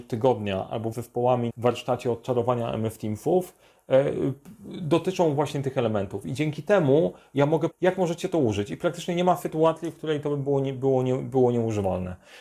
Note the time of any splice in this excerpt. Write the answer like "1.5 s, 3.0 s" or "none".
0.9 s, 1.5 s, 7.7 s

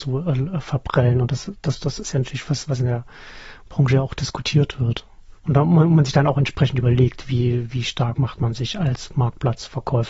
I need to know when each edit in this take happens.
5.4 s

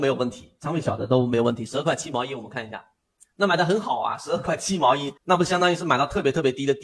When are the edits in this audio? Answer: 5.2 s

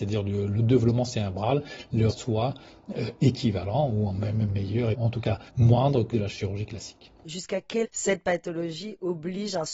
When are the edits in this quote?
2.1 s, 4.9 s, 5.5 s, 6.1 s, 7.2 s, 7.8 s

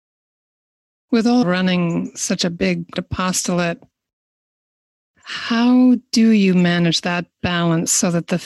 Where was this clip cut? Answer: 1.4 s, 3.0 s

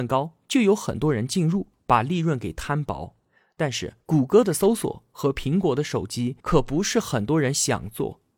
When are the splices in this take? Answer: 4.0 s, 6.4 s

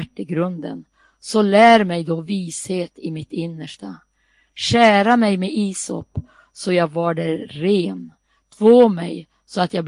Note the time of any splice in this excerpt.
none

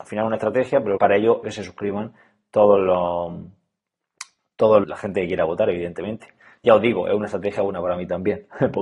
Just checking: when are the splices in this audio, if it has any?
1.0 s, 1.4 s, 4.8 s

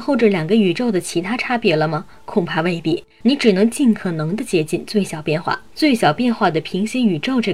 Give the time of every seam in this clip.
3.1 s, 5.7 s

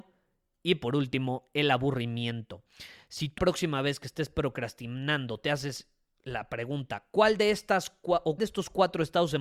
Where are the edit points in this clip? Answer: 3.4 s, 8.4 s

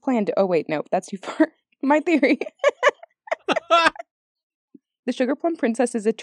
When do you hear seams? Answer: none

